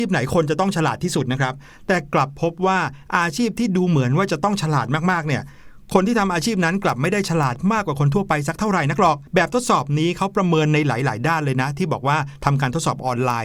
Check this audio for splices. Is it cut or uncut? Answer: cut